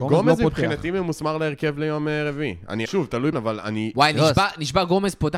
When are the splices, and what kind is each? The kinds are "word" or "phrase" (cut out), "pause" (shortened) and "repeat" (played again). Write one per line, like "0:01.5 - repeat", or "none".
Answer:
0:02.9 - phrase
0:03.3 - word